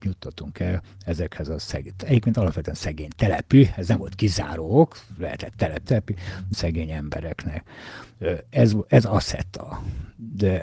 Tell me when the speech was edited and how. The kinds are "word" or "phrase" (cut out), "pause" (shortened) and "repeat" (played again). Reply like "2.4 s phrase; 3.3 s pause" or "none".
5.8 s word; 6.5 s word